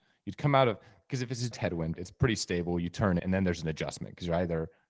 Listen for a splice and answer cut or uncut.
cut